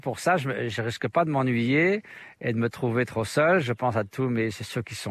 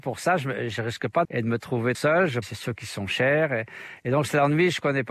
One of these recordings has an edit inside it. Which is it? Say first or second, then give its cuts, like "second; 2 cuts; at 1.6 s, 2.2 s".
second; 3 cuts; at 1.2 s, 1.9 s, 2.4 s